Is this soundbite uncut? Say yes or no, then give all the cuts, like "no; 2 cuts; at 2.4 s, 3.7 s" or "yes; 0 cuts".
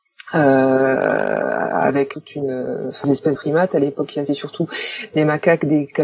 no; 4 cuts; at 2.1 s, 3.0 s, 3.4 s, 4.3 s